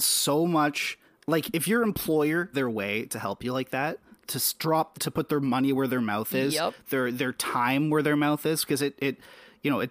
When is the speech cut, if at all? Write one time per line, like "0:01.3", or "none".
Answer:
0:01.1
0:02.5
0:04.9